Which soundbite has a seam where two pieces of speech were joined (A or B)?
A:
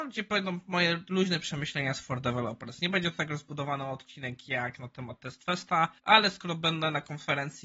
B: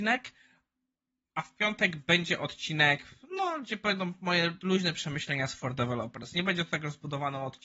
A